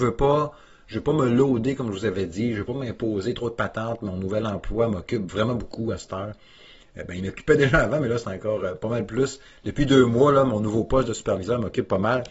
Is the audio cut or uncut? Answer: uncut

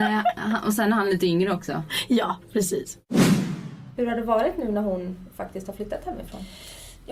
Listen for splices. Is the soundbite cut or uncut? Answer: uncut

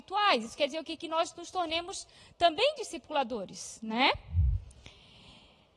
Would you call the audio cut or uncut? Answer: uncut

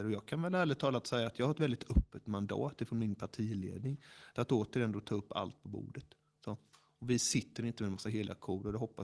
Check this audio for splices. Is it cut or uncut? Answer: uncut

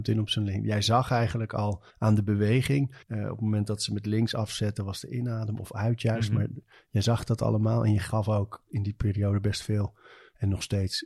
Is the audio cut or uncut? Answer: cut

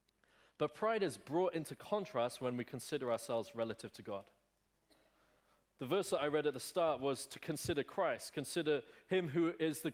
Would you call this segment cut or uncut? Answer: uncut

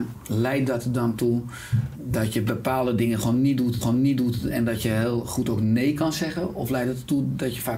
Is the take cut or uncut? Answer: cut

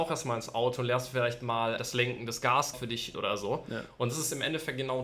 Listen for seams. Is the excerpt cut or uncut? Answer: cut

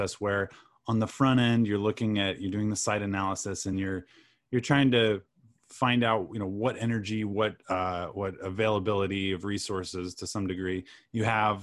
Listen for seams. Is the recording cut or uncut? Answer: uncut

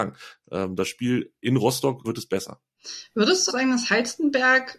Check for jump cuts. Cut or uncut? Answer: cut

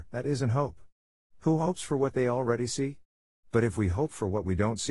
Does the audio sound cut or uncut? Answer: uncut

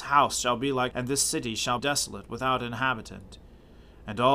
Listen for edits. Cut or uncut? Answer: cut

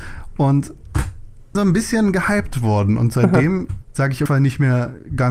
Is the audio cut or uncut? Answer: cut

